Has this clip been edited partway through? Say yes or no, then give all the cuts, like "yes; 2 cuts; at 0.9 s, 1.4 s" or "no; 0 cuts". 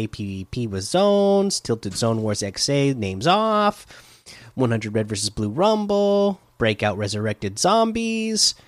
no; 0 cuts